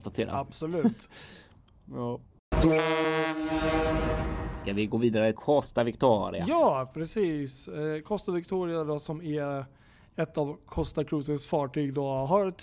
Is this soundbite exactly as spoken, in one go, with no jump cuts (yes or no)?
no